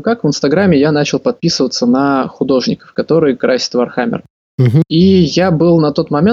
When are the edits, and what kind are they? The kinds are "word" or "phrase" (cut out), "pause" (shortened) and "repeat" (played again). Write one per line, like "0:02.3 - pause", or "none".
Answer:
none